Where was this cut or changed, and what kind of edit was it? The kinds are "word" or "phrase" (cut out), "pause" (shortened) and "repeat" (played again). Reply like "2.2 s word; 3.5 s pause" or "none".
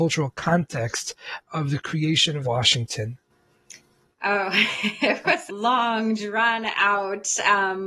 1.5 s word; 2.4 s phrase; 5.5 s phrase

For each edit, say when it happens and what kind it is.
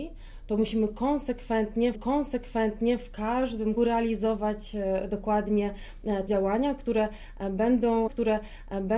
1.9 s repeat; 3.8 s word; 6.3 s word; 8.1 s repeat

